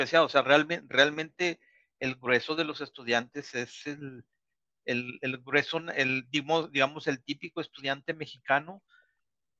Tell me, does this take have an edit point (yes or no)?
no